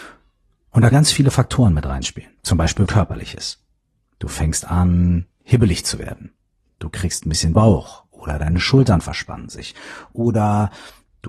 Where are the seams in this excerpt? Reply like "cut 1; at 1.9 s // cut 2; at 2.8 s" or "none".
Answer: cut 1; at 0.9 s // cut 2; at 2.4 s // cut 3; at 2.9 s // cut 4; at 7.5 s